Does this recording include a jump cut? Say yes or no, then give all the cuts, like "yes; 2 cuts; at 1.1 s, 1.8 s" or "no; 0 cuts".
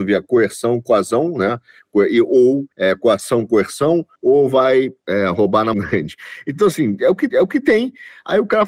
yes; 5 cuts; at 2.7 s, 4.2 s, 5.0 s, 5.7 s, 7.3 s